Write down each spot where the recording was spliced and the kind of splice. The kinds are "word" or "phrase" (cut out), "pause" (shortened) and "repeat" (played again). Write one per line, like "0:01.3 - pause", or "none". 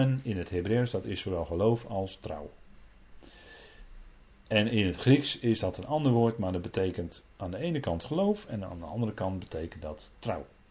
none